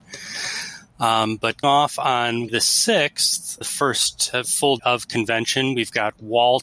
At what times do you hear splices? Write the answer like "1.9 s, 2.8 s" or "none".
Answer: 1.6 s, 2.5 s, 3.6 s, 4.8 s